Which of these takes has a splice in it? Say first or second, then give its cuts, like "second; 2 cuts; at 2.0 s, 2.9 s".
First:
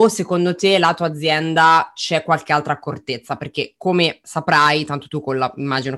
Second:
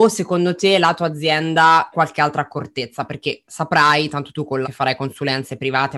second; 3 cuts; at 1.9 s, 3.4 s, 4.6 s